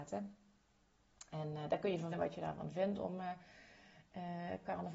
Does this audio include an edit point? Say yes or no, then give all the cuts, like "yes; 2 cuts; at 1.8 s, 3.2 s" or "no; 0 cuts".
yes; 1 cut; at 2.1 s